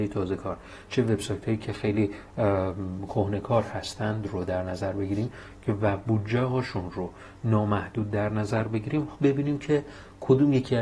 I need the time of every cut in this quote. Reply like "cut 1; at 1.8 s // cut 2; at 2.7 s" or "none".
cut 1; at 9.1 s